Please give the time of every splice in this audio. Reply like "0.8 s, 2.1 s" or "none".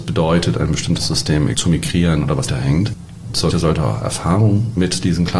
1.5 s, 2.5 s, 3.5 s